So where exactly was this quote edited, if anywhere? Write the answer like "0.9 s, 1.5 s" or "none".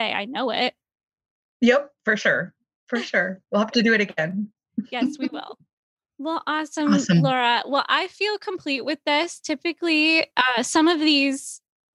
10.3 s